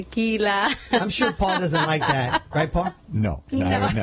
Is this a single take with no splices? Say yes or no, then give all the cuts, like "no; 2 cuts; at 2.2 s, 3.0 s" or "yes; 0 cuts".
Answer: yes; 0 cuts